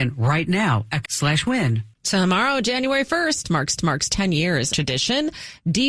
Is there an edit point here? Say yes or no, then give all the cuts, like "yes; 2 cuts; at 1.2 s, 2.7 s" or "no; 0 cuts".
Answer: yes; 4 cuts; at 1.0 s, 1.9 s, 3.8 s, 4.7 s